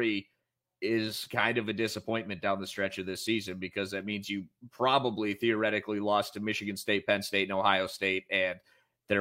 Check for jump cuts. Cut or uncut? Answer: uncut